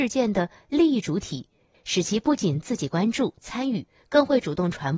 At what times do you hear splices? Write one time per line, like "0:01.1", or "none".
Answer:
none